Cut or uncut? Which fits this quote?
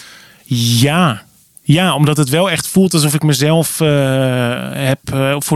uncut